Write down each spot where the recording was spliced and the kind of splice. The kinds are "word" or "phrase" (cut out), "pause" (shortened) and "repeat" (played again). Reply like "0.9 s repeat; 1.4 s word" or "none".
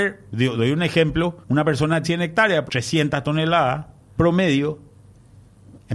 1.4 s pause; 2.0 s word; 2.7 s word; 4.2 s word